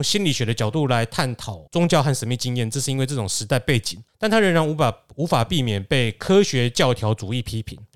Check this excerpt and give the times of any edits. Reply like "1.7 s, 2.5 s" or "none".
1.7 s